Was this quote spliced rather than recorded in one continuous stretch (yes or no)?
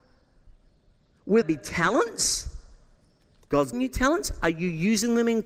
yes